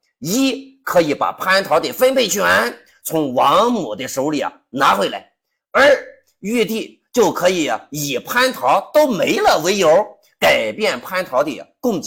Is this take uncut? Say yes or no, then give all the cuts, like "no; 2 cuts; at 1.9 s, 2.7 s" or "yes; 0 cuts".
yes; 0 cuts